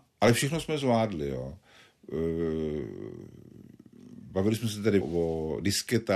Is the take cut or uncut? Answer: cut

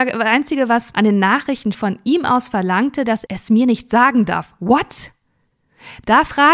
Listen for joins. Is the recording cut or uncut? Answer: cut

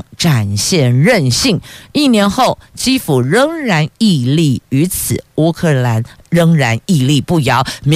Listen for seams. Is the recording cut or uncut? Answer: uncut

